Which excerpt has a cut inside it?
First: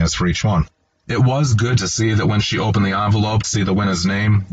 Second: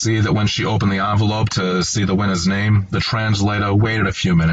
first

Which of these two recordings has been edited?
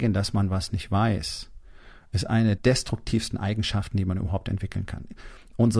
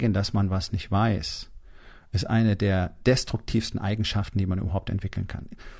first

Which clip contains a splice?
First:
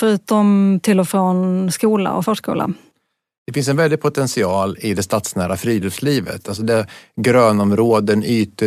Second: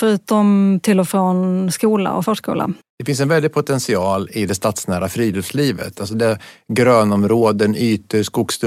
second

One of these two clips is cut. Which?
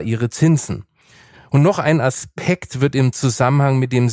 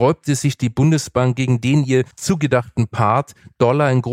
second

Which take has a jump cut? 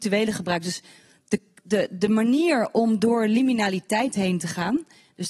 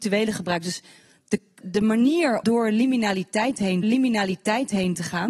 second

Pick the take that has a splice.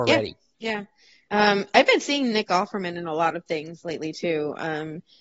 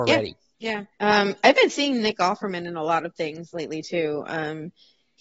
second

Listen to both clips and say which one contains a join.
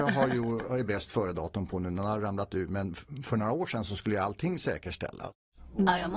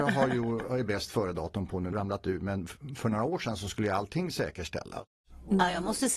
second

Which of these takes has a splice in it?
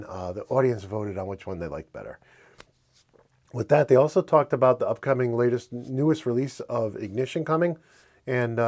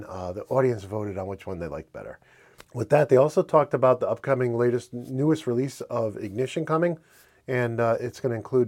second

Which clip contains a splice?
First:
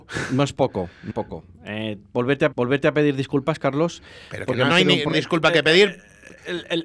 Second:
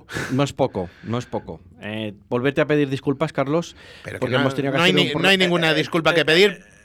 first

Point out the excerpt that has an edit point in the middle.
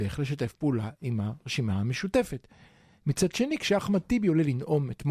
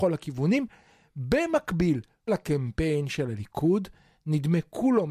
second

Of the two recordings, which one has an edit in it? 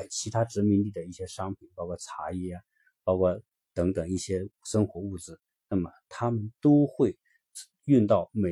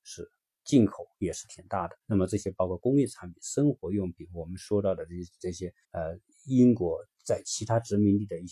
second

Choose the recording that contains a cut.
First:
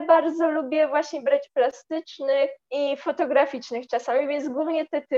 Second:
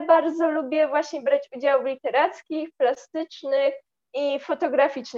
first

